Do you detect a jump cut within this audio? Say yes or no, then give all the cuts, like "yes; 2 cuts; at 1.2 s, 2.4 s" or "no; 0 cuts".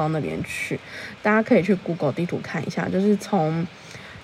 no; 0 cuts